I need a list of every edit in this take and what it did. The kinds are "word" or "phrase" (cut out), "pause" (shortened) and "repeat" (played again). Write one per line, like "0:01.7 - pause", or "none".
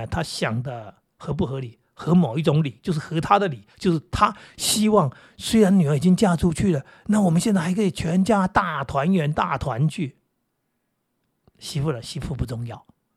0:03.7 - pause

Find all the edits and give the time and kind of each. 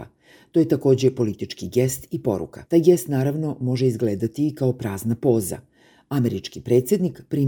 0:02.7 - pause

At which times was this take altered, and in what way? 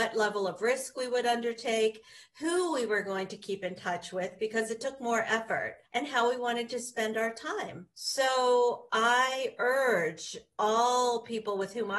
0:05.8 - pause
0:07.9 - pause

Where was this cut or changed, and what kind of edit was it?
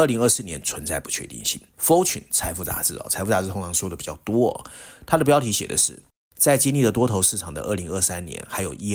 none

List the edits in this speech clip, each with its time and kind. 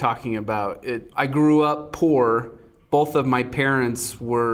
none

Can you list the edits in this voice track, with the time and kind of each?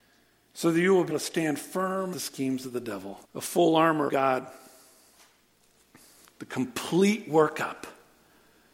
0:01.1 - word
0:02.1 - word
0:03.2 - pause
0:04.1 - word

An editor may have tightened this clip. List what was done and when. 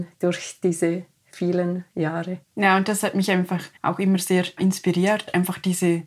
0:02.4 - pause
0:03.8 - pause

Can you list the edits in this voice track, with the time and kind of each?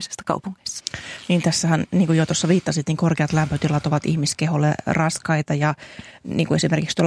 none

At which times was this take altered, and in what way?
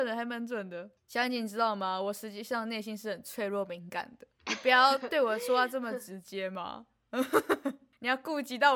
0:01.0 - pause
0:04.4 - pause

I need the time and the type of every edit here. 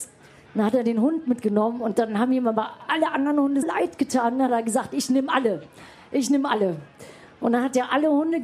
0:03.6 - word

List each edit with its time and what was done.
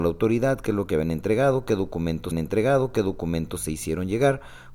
0:02.3 - repeat

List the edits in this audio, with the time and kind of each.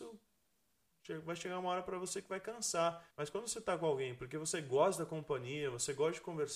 0:03.1 - pause

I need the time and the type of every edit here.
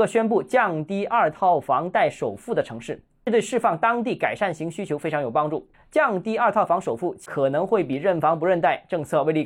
0:05.7 - pause

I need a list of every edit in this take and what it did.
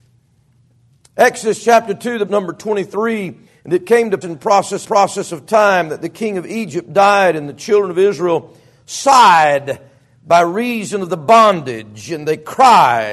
0:02.3 - phrase
0:03.5 - pause
0:04.2 - word
0:04.8 - repeat

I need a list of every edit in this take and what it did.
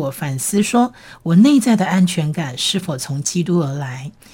none

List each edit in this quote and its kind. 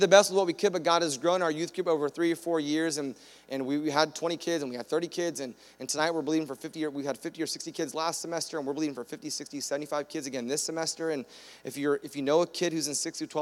none

